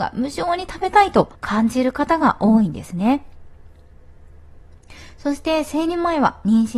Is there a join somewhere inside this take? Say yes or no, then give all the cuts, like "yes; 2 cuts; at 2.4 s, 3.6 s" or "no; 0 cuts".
yes; 1 cut; at 1.3 s